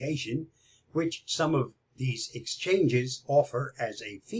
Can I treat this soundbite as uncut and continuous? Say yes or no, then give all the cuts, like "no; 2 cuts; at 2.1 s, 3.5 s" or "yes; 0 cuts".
yes; 0 cuts